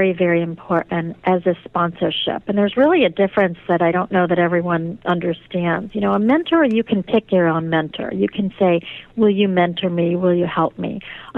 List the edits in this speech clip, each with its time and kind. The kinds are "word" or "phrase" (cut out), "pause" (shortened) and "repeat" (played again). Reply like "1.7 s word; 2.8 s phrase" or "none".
none